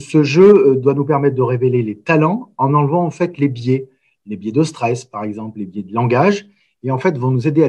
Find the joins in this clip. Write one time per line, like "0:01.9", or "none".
none